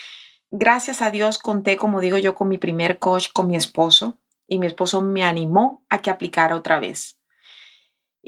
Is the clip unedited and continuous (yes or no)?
yes